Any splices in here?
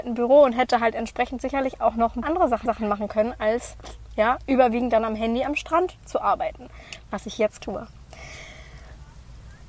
yes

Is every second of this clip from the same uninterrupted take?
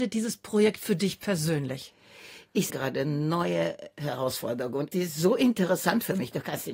no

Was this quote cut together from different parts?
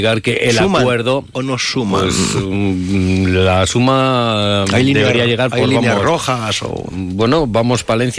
no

